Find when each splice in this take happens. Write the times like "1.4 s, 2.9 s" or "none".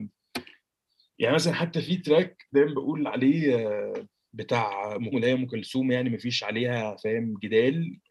5.1 s